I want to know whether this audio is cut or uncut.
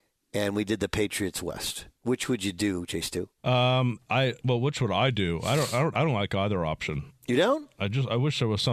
cut